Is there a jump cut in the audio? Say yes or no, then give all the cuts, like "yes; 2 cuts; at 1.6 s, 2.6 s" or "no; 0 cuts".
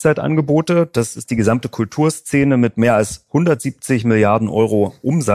no; 0 cuts